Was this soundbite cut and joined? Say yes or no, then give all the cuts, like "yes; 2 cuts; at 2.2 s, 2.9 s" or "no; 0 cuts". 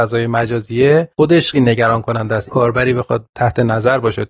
yes; 2 cuts; at 1.5 s, 2.5 s